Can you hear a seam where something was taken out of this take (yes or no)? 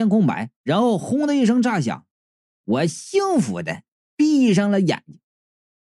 no